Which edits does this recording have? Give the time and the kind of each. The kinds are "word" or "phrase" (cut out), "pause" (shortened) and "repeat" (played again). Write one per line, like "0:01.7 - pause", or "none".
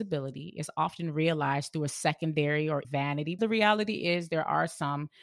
0:02.8 - word
0:03.4 - phrase